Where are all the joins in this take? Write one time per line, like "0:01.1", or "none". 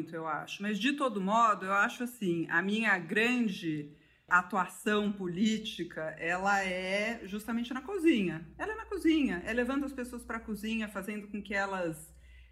none